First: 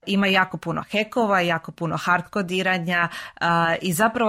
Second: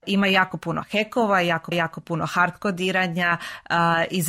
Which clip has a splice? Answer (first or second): second